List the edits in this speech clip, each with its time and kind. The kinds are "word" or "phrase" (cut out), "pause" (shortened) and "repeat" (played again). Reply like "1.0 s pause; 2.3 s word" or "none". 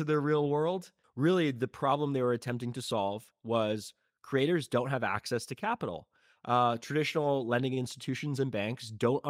none

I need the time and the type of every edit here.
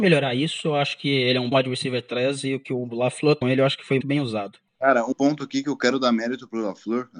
1.5 s word; 3.4 s phrase; 4.0 s word; 4.7 s pause; 5.1 s word

